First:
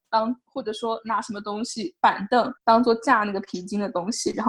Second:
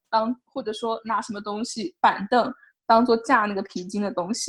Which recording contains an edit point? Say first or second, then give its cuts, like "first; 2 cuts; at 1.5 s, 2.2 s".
first; 1 cut; at 2.6 s